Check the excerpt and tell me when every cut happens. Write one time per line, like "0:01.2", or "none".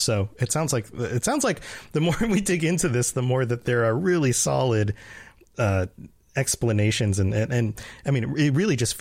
none